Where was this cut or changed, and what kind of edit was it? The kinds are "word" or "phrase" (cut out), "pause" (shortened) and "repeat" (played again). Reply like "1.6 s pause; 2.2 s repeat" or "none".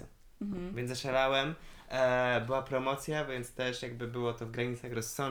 none